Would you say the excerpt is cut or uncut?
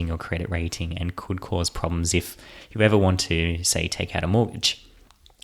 uncut